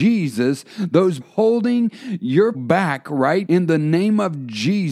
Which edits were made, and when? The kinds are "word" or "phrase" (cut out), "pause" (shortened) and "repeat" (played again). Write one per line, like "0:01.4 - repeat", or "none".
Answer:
0:01.2 - phrase
0:02.5 - word
0:03.5 - word